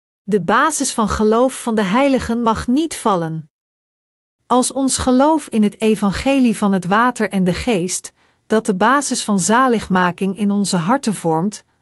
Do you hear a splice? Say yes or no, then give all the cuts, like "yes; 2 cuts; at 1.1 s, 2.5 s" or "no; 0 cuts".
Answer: no; 0 cuts